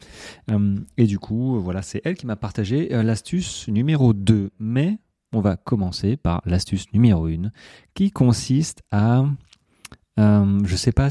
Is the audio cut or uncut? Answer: uncut